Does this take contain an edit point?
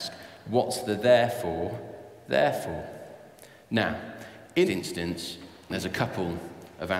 yes; 2 cuts; at 4.7 s, 5.7 s

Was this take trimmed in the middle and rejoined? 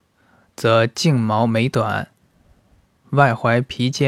no; 0 cuts

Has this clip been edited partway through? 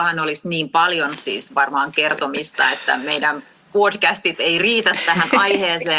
no; 0 cuts

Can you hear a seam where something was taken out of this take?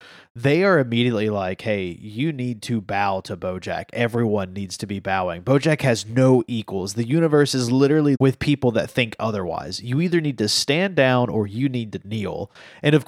yes; 1 cut; at 8.2 s

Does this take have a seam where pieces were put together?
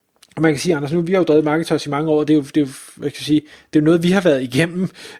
no; 0 cuts

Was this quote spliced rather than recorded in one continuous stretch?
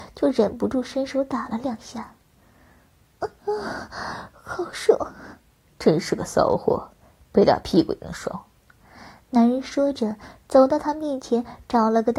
no; 0 cuts

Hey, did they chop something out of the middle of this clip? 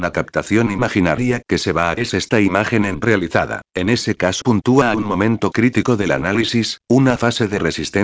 yes; 6 cuts; at 1.4 s, 2.0 s, 3.0 s, 3.7 s, 4.4 s, 4.9 s

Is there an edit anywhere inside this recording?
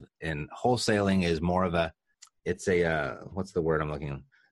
no; 0 cuts

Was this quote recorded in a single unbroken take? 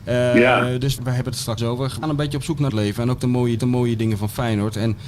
no; 5 cuts; at 1.0 s, 1.6 s, 2.0 s, 2.7 s, 3.6 s

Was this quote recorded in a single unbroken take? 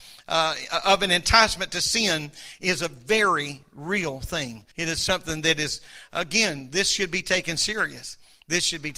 no; 1 cut; at 4.7 s

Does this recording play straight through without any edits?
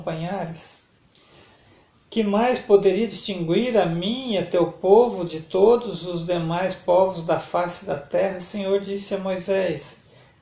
yes; 0 cuts

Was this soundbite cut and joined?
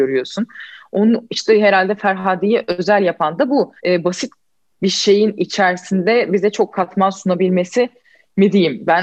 yes; 1 cut; at 3.8 s

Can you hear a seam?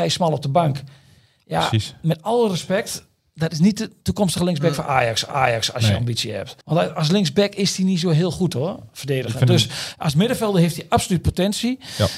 yes; 2 cuts; at 5.3 s, 6.6 s

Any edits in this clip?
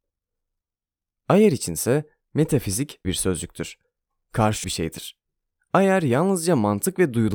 yes; 2 cuts; at 3.0 s, 4.6 s

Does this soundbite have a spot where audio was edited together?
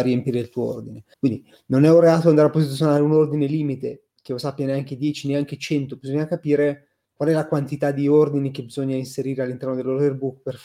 yes; 2 cuts; at 1.1 s, 7.0 s

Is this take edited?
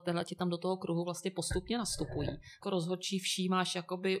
yes; 1 cut; at 2.6 s

